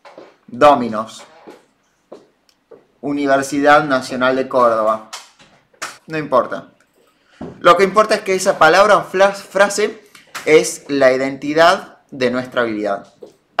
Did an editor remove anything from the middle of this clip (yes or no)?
yes